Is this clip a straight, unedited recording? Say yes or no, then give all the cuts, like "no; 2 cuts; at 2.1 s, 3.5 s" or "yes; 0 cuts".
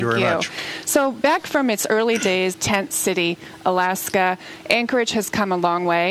no; 1 cut; at 2.5 s